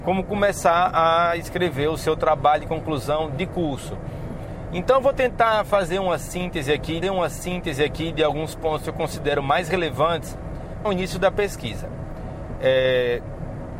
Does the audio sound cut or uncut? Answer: cut